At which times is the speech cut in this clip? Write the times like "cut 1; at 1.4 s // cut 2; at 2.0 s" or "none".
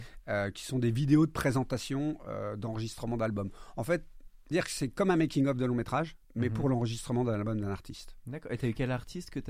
cut 1; at 4.5 s // cut 2; at 6.2 s